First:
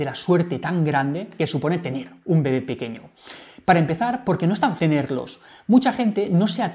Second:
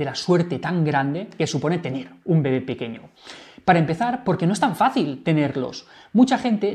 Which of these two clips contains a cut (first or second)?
first